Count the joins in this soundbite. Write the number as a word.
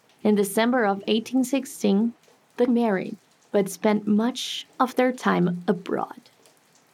one